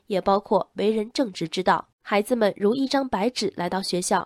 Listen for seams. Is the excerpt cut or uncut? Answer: cut